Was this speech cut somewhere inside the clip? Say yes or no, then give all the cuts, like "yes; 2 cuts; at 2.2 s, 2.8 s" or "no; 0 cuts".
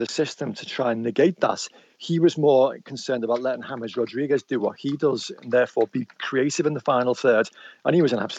no; 0 cuts